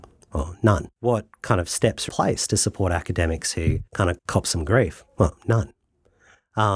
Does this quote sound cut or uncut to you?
cut